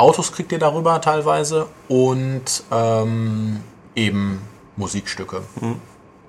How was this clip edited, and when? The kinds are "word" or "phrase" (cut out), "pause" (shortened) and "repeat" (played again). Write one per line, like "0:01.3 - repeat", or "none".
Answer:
none